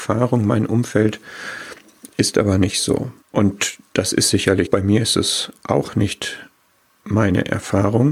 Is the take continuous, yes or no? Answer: no